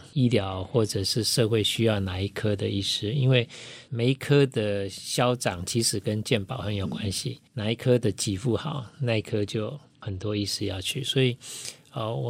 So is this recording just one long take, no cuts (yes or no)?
no